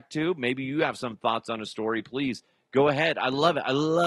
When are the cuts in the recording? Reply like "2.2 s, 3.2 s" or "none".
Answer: none